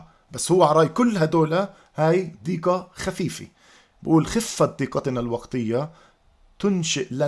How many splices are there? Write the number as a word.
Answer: zero